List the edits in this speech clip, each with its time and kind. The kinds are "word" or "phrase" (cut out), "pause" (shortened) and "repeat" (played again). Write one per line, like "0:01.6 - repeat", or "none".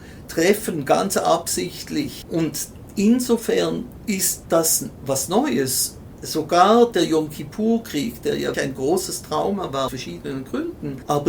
0:08.5 - word
0:09.9 - word